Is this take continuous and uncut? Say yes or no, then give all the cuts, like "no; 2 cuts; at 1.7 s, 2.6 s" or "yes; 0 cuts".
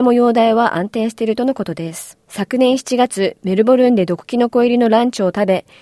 no; 1 cut; at 2.2 s